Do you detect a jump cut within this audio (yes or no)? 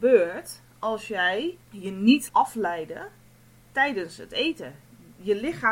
yes